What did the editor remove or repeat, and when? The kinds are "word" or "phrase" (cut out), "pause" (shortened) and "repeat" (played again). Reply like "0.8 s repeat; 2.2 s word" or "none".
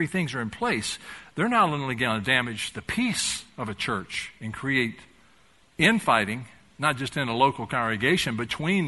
none